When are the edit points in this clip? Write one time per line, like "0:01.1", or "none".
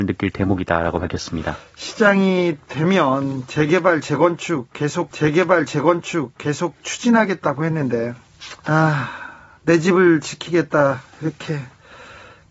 0:05.1
0:08.6